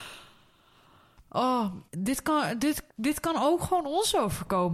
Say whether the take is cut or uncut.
cut